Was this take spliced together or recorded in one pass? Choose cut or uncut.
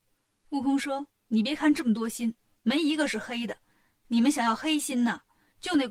cut